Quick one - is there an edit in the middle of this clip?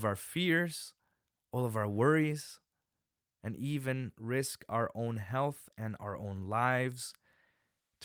no; 0 cuts

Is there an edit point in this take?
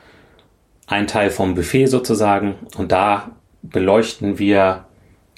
no; 0 cuts

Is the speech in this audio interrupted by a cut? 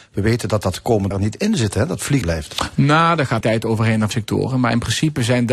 yes; 4 cuts; at 1.1 s, 2.2 s, 3.4 s, 4.1 s

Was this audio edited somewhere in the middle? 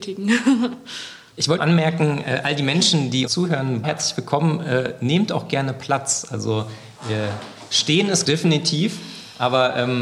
yes; 4 cuts; at 1.6 s, 3.3 s, 3.8 s, 8.2 s

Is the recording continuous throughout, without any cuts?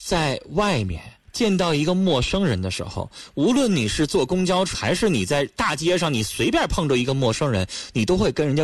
no; 2 cuts; at 1.3 s, 4.7 s

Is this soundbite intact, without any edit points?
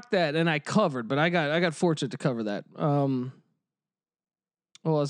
yes; 0 cuts

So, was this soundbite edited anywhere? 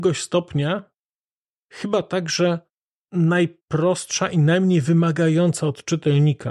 no; 0 cuts

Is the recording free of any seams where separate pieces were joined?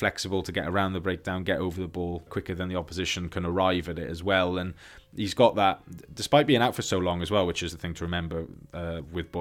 no; 2 cuts; at 2.3 s, 7.7 s

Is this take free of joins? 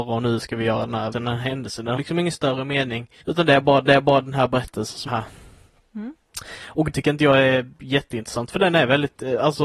no; 6 cuts; at 1.1 s, 2.0 s, 3.2 s, 3.9 s, 5.1 s, 6.9 s

